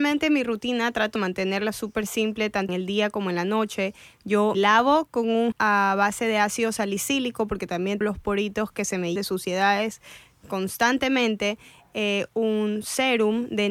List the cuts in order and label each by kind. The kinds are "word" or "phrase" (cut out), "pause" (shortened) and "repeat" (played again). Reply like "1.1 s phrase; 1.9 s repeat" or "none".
1.2 s word; 2.7 s word; 4.5 s word; 5.5 s word; 8.0 s word; 9.2 s word; 12.3 s word